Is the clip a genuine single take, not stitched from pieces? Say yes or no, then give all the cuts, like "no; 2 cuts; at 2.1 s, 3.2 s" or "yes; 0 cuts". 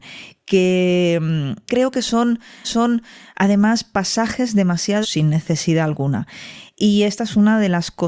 no; 3 cuts; at 1.7 s, 2.6 s, 5.0 s